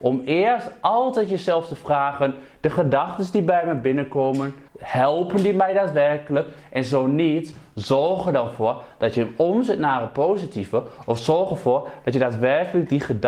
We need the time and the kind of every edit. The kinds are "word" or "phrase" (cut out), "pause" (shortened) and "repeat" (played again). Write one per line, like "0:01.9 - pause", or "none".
0:04.7 - pause